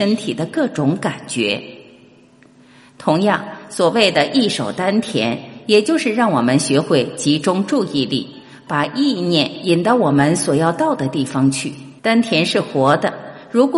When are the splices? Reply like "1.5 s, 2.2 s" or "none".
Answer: 12.0 s